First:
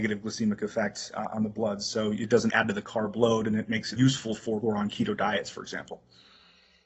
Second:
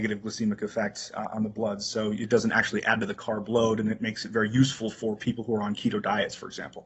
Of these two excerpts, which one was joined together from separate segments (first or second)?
first